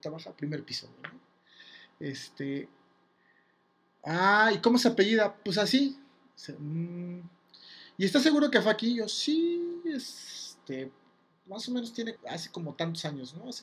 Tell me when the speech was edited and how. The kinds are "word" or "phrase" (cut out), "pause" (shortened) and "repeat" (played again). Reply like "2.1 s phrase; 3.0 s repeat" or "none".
12.2 s word